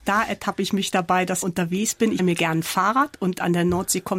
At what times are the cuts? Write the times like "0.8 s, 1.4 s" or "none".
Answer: 1.4 s, 2.2 s